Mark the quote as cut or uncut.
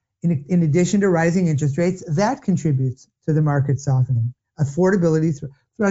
uncut